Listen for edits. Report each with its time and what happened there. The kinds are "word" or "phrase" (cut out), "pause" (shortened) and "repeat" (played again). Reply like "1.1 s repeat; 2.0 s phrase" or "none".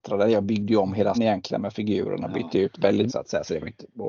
1.1 s word; 3.1 s word

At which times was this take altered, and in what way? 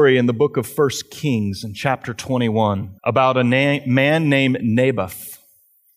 3.0 s pause

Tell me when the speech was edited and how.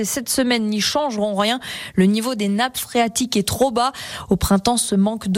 none

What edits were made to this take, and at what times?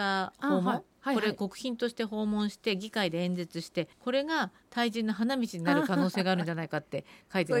3.9 s pause

